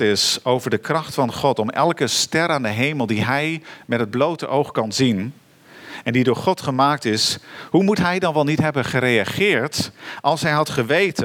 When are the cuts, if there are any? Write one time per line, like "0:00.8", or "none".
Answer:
none